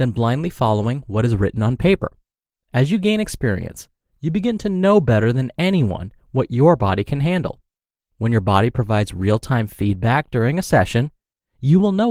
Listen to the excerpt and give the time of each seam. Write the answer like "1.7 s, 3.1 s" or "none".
none